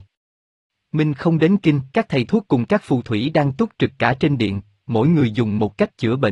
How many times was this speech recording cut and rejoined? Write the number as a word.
one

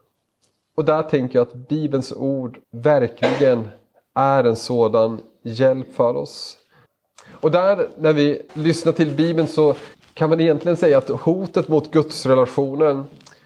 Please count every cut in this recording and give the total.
four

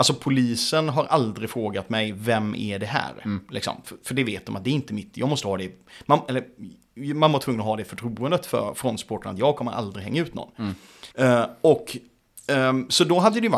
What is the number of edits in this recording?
one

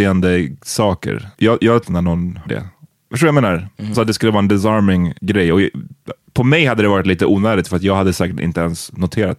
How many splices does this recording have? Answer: five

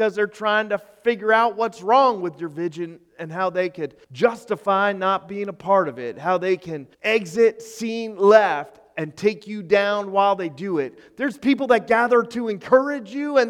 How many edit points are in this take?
two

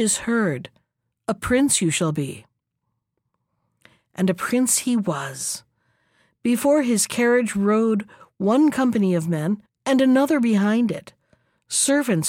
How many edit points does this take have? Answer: one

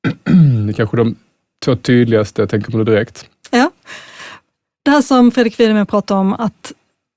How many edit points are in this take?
zero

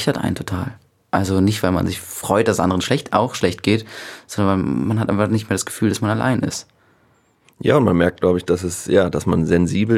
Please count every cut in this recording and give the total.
zero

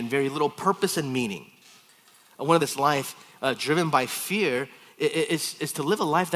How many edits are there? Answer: one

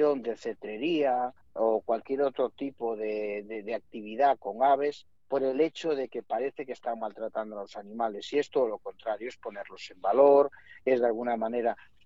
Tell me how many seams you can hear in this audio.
two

